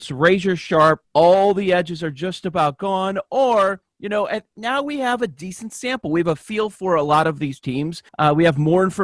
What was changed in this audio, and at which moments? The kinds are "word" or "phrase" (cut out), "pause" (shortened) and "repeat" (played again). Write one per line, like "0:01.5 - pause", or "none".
0:01.0 - pause
0:04.5 - pause
0:08.1 - pause